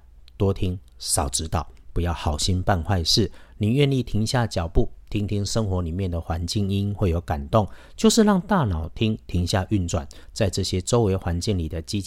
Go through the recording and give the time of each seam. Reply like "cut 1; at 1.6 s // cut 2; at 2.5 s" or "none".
none